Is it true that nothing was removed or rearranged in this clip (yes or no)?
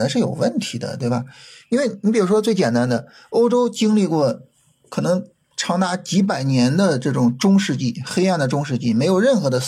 yes